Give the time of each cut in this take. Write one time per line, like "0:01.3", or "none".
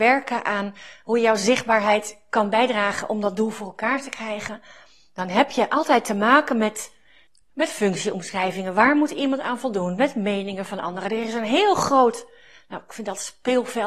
none